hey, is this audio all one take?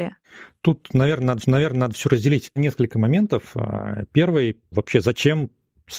no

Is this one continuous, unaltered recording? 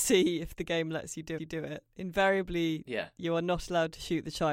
no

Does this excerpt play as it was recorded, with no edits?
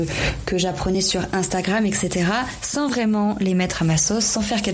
yes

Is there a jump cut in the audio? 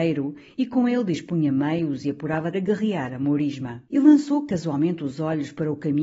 yes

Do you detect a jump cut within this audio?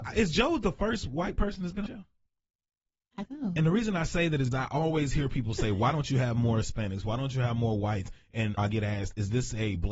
yes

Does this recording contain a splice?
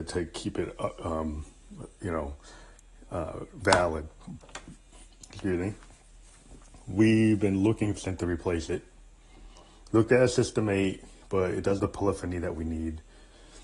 yes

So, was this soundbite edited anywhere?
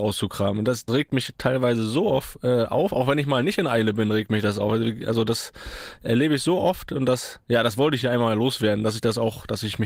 no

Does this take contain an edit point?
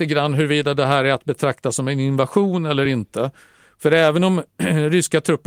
no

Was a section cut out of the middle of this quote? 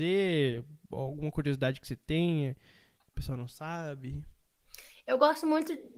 no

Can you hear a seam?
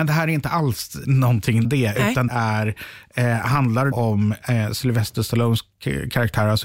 yes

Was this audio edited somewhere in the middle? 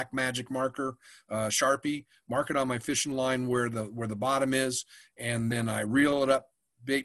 no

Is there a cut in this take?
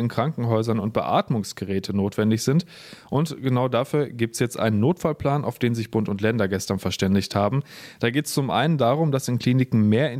no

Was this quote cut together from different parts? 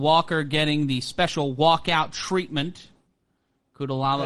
no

